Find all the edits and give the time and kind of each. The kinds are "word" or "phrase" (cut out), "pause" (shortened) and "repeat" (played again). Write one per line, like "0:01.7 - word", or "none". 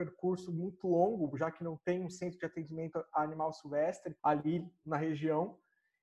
0:04.2 - pause

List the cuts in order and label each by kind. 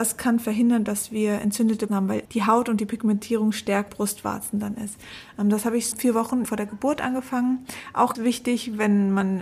0:01.9 - word
0:02.2 - word
0:03.9 - word
0:05.9 - word
0:06.4 - word
0:08.1 - word

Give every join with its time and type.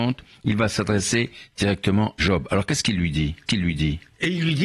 0:02.2 - word
0:03.5 - repeat

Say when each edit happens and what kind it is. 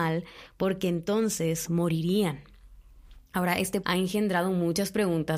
0:03.8 - word

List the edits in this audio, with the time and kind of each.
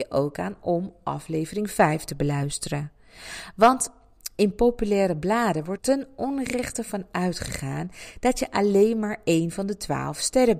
0:05.8 - word

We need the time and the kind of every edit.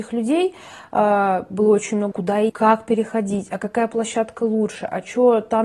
0:02.1 - word
0:02.5 - word

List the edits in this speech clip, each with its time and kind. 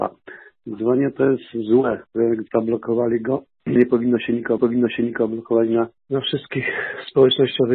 0:02.1 - pause
0:03.8 - word
0:04.6 - repeat
0:06.0 - pause

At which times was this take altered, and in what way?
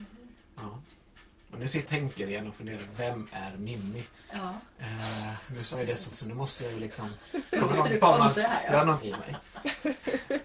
0:01.9 - word
0:05.7 - word
0:06.1 - word
0:09.0 - word

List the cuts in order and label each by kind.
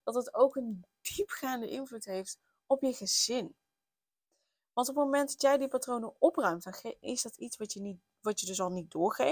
none

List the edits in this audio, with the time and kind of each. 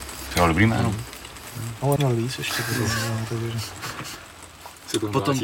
0:02.0 - word

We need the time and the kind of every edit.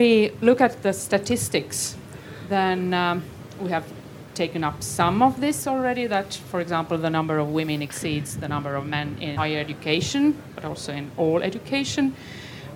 0:09.4 - word

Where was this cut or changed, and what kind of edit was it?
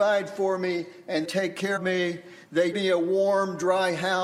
0:01.2 - word
0:01.8 - word
0:02.7 - word

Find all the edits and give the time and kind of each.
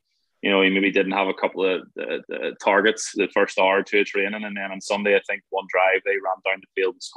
0:02.2 - repeat

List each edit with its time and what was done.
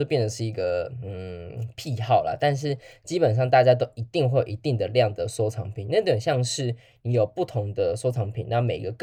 none

